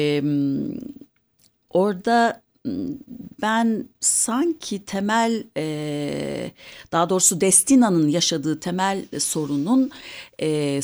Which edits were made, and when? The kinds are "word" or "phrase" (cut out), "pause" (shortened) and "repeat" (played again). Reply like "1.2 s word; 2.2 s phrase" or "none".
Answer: 3.9 s pause